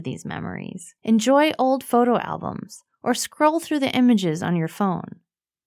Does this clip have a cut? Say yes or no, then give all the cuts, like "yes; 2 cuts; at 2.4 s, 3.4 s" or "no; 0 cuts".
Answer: yes; 1 cut; at 1.0 s